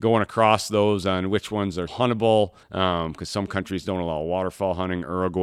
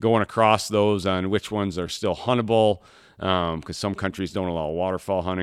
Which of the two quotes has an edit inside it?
first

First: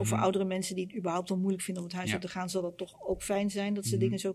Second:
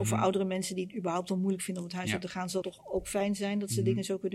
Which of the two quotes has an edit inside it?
second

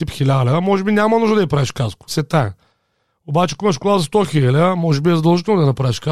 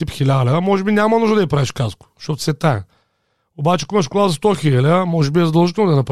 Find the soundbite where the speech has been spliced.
first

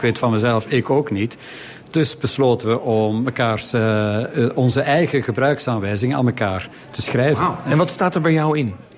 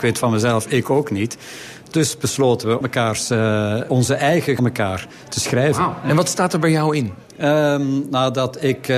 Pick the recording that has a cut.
second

